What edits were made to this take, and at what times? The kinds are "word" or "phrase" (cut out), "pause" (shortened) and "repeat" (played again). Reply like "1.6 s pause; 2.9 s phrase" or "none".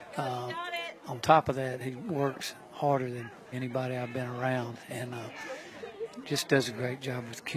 3.5 s word